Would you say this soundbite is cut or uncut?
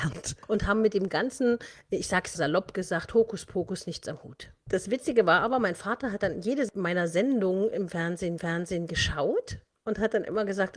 cut